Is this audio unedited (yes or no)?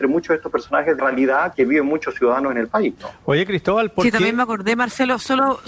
no